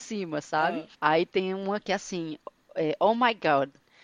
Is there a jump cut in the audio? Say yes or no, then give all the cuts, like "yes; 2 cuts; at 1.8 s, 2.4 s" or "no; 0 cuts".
yes; 1 cut; at 0.9 s